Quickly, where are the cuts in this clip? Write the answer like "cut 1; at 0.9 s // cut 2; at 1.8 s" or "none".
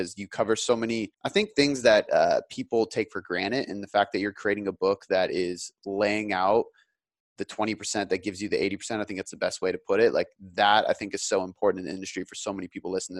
cut 1; at 1.1 s